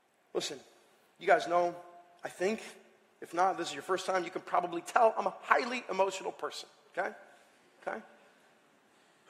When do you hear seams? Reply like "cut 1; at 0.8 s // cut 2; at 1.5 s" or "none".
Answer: none